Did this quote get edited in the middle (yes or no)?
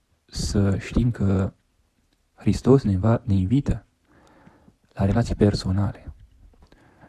no